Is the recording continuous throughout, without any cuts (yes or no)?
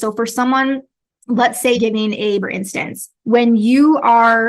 no